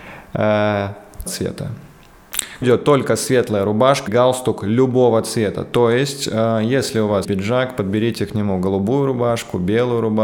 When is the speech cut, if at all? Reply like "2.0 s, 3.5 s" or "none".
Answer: 1.3 s, 2.6 s, 4.1 s, 7.2 s